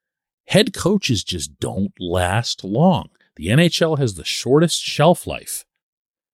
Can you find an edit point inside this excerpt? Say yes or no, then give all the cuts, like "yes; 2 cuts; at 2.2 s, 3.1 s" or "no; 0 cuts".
no; 0 cuts